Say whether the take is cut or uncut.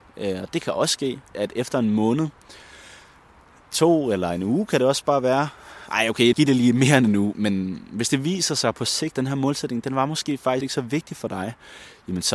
cut